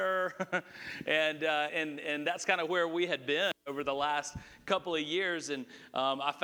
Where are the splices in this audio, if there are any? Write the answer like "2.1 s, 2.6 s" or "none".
1.7 s